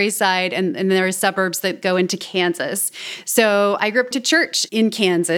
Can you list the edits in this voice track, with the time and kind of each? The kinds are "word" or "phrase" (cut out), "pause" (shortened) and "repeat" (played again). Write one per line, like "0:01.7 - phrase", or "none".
0:04.1 - word